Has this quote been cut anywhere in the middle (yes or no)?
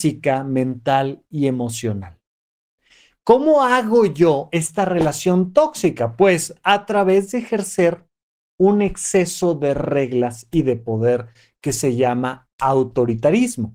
no